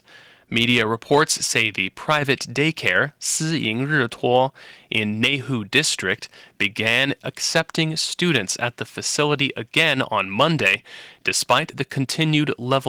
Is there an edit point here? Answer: no; 0 cuts

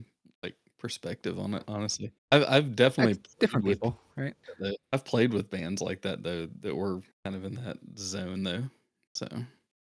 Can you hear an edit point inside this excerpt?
yes; 3 cuts; at 2.2 s, 4.8 s, 7.1 s

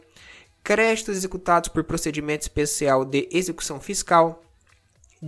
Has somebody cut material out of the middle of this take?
no; 0 cuts

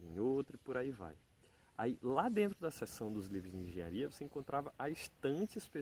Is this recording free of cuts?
yes; 0 cuts

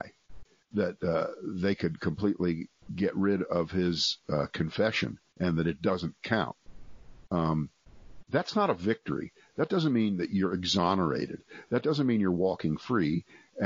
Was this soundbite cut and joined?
no; 0 cuts

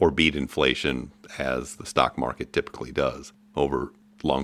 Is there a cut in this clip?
no; 0 cuts

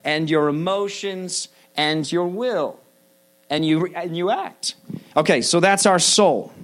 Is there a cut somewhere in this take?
no; 0 cuts

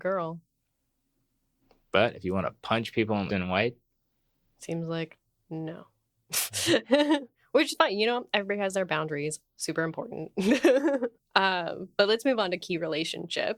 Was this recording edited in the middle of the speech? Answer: yes; 1 cut; at 3.3 s

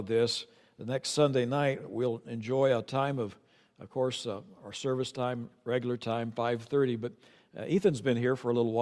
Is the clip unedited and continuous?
yes; 0 cuts

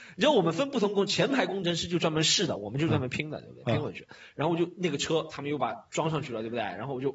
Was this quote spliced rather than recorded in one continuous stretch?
no; 0 cuts

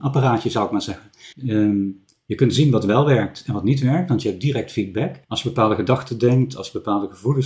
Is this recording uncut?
no; 2 cuts; at 1.3 s, 5.2 s

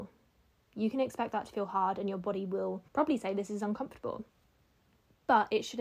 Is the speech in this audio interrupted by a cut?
yes; 1 cut; at 2.9 s

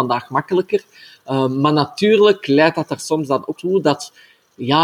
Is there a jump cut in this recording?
yes; 1 cut; at 3.6 s

